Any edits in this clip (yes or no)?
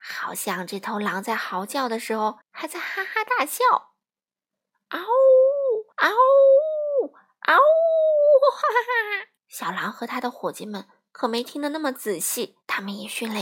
yes